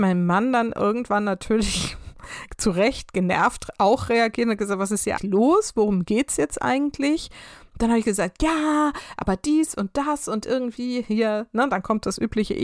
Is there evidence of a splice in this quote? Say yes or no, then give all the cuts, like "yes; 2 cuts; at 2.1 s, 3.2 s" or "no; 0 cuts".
yes; 1 cut; at 5.2 s